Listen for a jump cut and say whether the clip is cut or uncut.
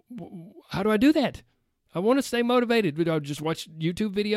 uncut